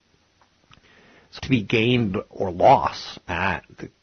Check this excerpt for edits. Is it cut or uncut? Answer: cut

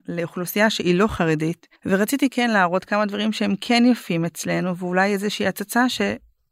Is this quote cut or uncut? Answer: cut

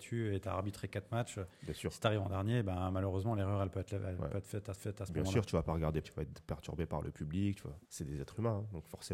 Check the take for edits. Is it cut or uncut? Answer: cut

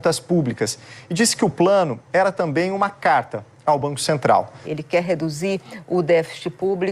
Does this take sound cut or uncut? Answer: uncut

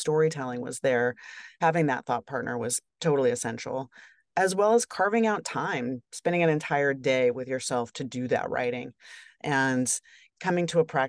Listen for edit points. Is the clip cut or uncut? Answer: uncut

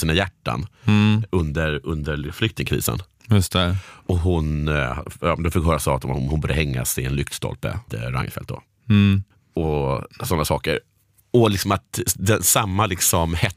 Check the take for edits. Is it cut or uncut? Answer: cut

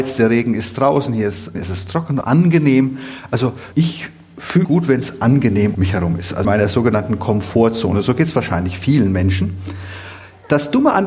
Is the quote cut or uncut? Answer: cut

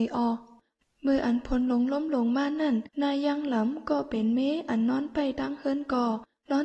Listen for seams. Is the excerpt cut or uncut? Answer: cut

